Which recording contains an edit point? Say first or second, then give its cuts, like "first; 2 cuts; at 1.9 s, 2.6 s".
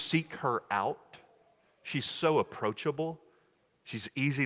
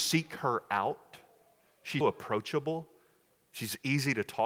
second; 1 cut; at 2.0 s